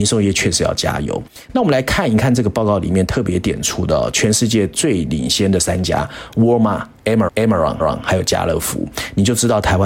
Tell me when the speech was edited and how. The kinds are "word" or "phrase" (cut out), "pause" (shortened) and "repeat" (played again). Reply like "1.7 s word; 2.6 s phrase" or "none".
7.3 s repeat; 7.8 s repeat